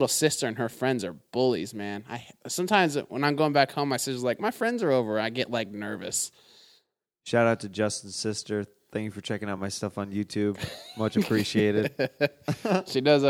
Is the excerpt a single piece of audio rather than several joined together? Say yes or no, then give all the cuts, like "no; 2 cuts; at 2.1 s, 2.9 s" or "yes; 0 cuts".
yes; 0 cuts